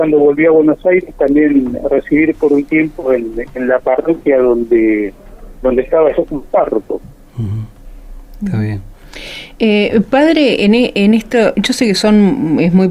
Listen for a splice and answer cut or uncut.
uncut